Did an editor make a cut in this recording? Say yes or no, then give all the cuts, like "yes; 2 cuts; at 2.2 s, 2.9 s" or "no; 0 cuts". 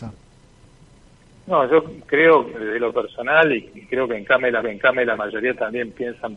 yes; 1 cut; at 4.6 s